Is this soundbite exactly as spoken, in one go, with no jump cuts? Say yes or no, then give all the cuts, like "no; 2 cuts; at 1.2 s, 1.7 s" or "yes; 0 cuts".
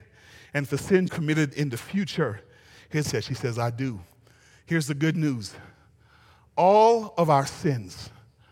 no; 2 cuts; at 1.1 s, 3.0 s